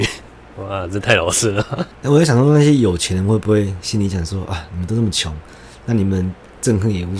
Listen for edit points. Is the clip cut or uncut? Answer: cut